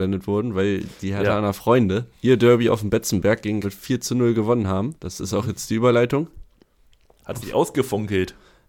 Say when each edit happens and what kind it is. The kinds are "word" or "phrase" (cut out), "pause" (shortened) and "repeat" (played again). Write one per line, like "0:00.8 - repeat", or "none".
0:02.1 - pause
0:03.6 - word
0:05.0 - pause